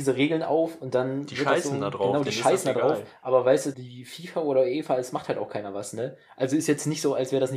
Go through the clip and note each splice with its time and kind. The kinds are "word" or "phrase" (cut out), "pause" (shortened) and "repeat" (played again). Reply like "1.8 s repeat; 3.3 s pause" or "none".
3.7 s word